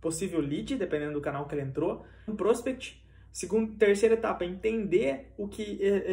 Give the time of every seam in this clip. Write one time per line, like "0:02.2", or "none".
0:02.3